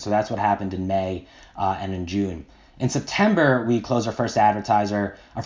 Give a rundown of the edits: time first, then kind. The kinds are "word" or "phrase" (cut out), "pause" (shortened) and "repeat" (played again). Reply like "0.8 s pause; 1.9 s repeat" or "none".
none